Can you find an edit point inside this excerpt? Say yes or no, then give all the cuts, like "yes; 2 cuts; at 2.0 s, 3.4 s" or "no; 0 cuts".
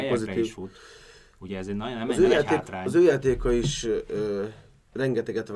no; 0 cuts